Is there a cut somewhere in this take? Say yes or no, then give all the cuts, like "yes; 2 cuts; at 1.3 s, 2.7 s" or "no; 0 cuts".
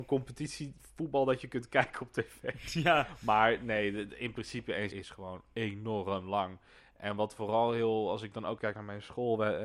yes; 2 cuts; at 4.9 s, 8.6 s